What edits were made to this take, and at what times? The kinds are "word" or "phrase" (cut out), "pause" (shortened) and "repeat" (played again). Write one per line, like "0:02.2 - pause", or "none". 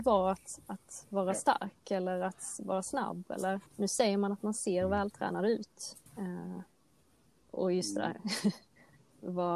0:03.7 - pause
0:06.1 - pause